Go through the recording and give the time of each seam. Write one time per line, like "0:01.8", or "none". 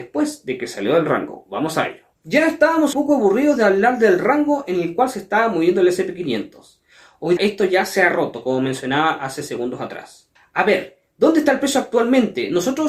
0:02.1
0:02.9
0:07.4
0:10.4

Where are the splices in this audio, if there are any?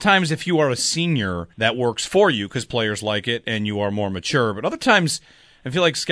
0:01.5

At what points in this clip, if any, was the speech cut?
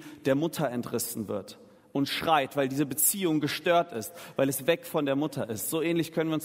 none

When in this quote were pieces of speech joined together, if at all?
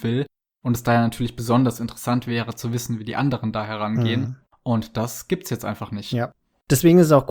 none

